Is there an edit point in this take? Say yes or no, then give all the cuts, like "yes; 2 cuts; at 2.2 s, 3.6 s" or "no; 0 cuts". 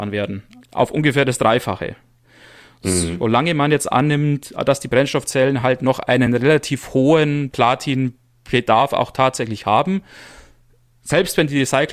no; 0 cuts